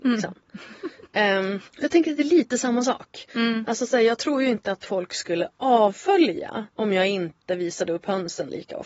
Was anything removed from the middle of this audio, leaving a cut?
yes; 2 cuts; at 1.7 s, 6.7 s

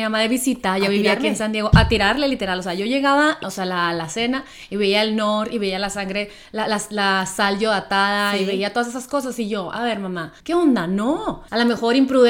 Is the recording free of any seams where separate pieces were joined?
no; 2 cuts; at 3.4 s, 10.4 s

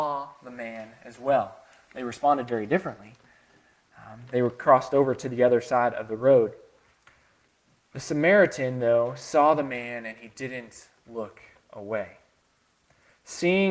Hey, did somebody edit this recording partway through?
no; 0 cuts

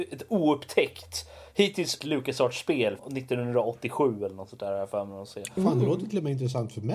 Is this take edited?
yes; 2 cuts; at 2.0 s, 3.0 s

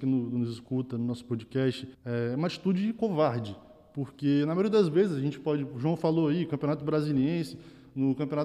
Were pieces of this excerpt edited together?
yes; 1 cut; at 1.9 s

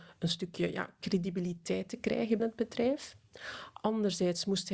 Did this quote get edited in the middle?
yes; 1 cut; at 2.4 s

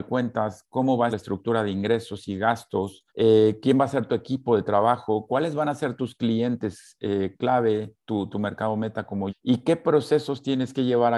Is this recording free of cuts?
no; 4 cuts; at 1.1 s, 3.1 s, 8.3 s, 9.3 s

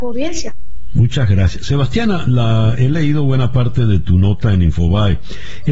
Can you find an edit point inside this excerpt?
no; 0 cuts

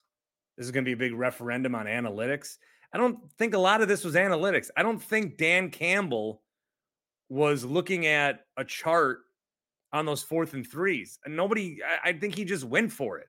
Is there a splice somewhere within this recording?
no; 0 cuts

